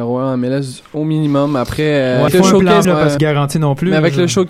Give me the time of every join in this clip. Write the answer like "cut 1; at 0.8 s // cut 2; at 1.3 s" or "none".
cut 1; at 2.3 s // cut 2; at 2.8 s // cut 3; at 3.2 s